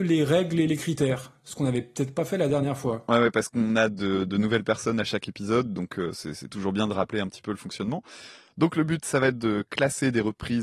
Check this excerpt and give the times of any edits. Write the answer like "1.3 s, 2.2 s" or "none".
none

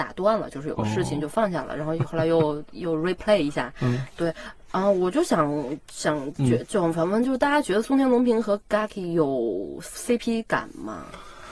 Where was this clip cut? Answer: 8.6 s

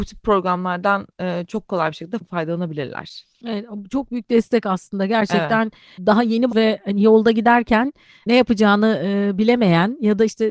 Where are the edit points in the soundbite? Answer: 6.5 s

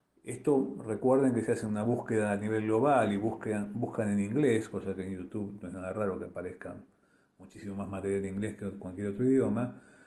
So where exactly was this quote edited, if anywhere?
none

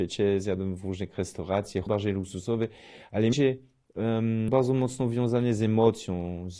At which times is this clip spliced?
1.9 s, 3.3 s, 4.5 s

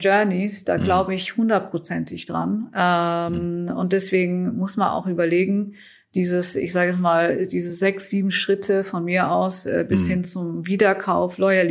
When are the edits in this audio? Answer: none

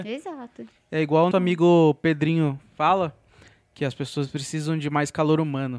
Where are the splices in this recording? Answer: 1.3 s

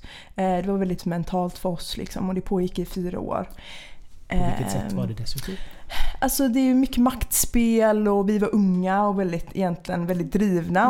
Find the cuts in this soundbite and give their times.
1.0 s

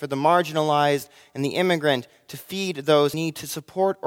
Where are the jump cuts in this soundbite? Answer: 3.1 s

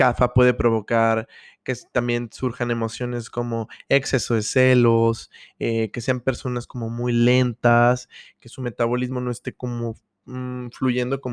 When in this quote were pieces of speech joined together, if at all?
none

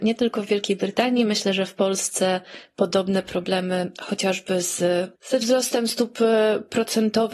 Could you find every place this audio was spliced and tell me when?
5.2 s

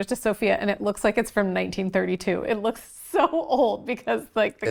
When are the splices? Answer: none

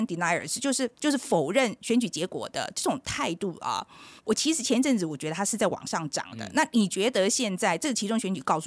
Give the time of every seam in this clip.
0.9 s, 4.2 s

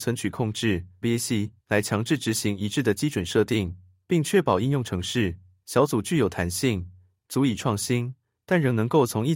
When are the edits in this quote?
1.0 s, 1.6 s, 5.6 s

